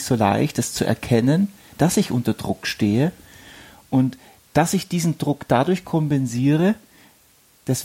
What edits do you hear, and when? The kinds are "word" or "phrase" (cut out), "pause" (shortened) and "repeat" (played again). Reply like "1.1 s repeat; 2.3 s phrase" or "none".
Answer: none